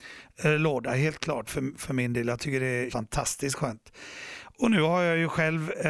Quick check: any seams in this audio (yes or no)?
yes